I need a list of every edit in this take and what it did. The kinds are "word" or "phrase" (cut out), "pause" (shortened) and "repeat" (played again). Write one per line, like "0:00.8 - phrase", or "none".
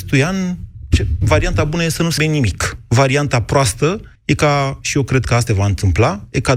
0:02.2 - word
0:04.2 - pause
0:05.5 - word